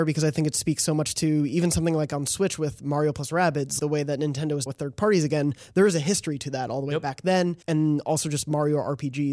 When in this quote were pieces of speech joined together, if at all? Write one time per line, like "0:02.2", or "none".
0:03.8
0:04.7
0:07.6